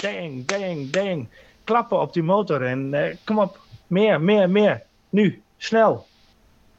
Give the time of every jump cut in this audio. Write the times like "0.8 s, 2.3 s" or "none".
none